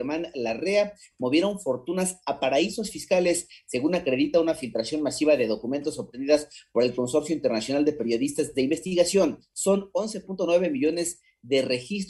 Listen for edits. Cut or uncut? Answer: uncut